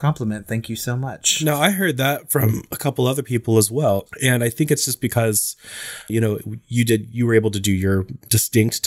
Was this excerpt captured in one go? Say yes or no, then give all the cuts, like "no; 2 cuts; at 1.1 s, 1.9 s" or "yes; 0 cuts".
no; 1 cut; at 6.1 s